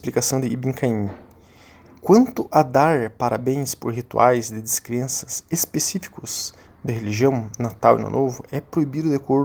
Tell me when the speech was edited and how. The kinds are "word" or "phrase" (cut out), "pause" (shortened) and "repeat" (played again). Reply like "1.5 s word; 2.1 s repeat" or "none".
6.9 s word